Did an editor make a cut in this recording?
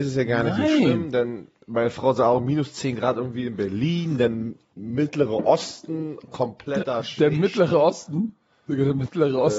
no; 0 cuts

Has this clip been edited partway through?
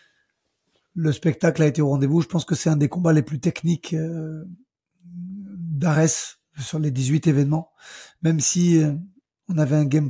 no; 0 cuts

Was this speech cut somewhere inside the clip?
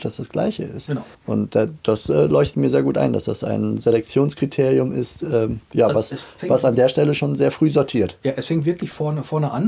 yes; 1 cut; at 1.1 s

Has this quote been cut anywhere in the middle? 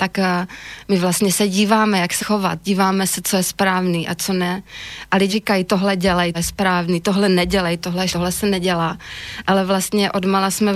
yes; 4 cuts; at 2.2 s, 5.3 s, 6.3 s, 8.1 s

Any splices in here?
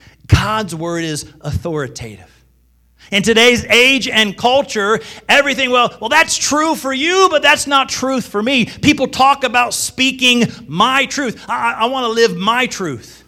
no; 0 cuts

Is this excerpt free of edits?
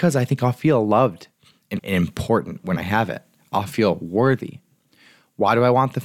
no; 1 cut; at 1.8 s

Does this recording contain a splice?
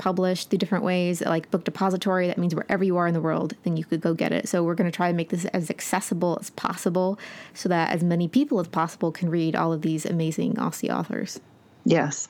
no; 0 cuts

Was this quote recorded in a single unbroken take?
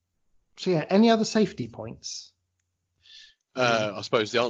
yes; 0 cuts

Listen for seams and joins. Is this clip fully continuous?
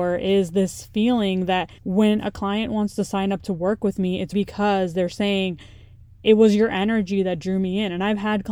no; 2 cuts; at 1.8 s, 4.3 s

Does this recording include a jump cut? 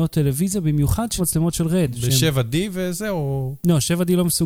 yes; 1 cut; at 1.2 s

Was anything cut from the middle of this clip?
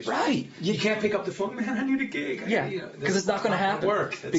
no; 0 cuts

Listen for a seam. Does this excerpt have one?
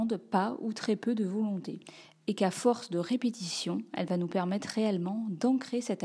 no; 0 cuts

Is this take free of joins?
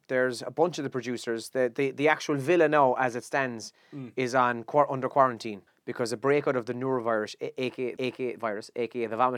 no; 2 cuts; at 5.7 s, 8.0 s

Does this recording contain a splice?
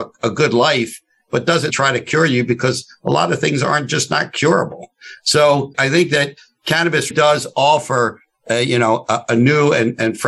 yes; 3 cuts; at 1.7 s, 5.7 s, 7.1 s

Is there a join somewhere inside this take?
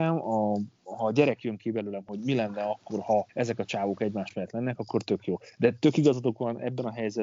yes; 1 cut; at 3.3 s

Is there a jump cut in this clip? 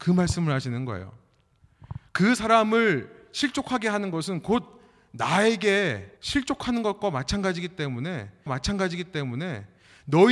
yes; 2 cuts; at 6.2 s, 8.5 s

